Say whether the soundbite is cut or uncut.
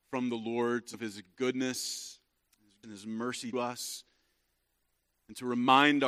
cut